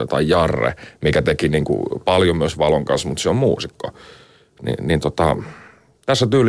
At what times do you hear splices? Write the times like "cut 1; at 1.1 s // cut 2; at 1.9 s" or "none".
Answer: none